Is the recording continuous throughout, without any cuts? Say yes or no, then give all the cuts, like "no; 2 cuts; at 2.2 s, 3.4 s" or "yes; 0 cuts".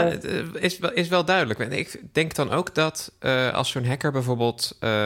yes; 0 cuts